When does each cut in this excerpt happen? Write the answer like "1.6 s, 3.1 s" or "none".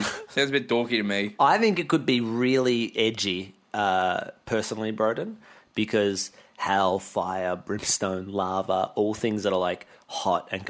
none